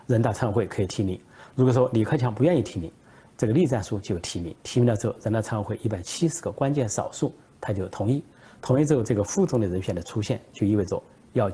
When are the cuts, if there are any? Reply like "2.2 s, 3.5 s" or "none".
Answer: none